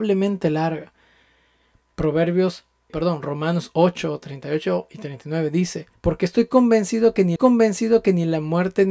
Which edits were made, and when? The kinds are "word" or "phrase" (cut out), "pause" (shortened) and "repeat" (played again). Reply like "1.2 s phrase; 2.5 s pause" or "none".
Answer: 2.9 s word; 5.9 s pause; 7.4 s repeat

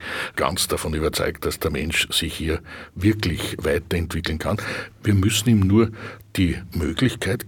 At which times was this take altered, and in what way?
none

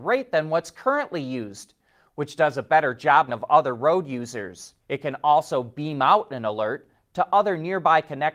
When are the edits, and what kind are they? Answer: 3.3 s phrase; 4.8 s pause

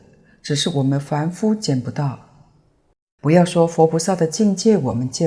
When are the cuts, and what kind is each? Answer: none

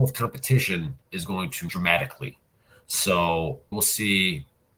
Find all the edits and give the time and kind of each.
1.0 s pause; 1.7 s word; 3.7 s word

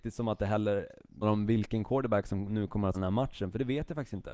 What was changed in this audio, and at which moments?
1.2 s word; 2.9 s word

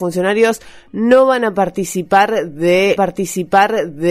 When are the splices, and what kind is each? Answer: 3.0 s repeat

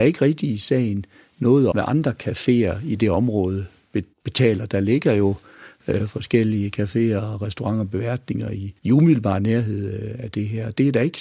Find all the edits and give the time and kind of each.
1.7 s word; 4.1 s pause; 8.8 s pause

